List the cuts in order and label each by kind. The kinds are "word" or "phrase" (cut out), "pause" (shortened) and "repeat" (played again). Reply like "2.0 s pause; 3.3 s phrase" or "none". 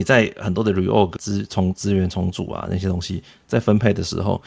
1.2 s word